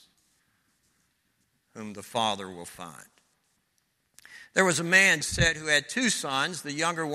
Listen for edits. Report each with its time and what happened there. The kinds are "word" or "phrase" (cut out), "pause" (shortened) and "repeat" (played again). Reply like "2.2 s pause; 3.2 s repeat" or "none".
5.2 s word